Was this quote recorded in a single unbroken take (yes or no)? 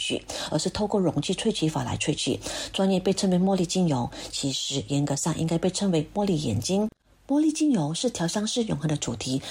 yes